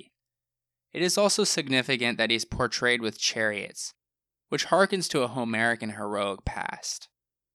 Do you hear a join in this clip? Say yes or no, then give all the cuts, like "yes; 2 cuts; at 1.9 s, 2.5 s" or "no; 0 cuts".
no; 0 cuts